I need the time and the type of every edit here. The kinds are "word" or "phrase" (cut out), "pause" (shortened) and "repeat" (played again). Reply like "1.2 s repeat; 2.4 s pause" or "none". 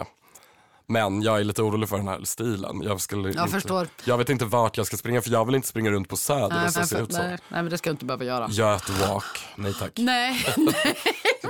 6.7 s repeat